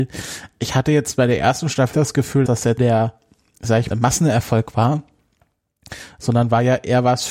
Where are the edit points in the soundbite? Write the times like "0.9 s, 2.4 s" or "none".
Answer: 1.9 s, 2.5 s, 2.8 s, 3.9 s